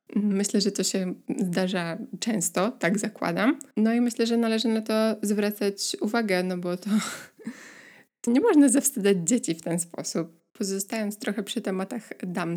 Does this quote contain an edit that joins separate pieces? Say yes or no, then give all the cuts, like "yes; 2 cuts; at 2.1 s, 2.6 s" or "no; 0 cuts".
yes; 3 cuts; at 3.7 s, 8.3 s, 10.5 s